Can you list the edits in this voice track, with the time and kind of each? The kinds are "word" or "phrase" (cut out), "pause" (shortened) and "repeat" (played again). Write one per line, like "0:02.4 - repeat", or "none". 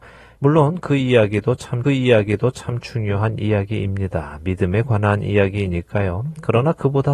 0:01.8 - repeat